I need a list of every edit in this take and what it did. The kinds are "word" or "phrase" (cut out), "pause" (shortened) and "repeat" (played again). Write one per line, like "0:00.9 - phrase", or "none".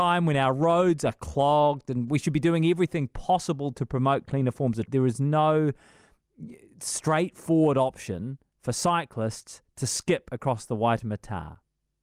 0:04.9 - word